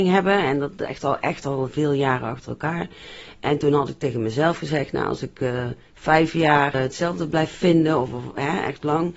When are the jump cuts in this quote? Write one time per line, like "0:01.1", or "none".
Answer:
0:06.7
0:08.1